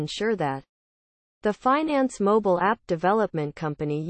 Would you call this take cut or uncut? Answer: uncut